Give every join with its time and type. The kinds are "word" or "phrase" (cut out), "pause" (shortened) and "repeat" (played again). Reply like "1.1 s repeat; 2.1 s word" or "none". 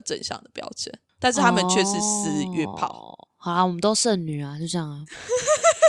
3.3 s pause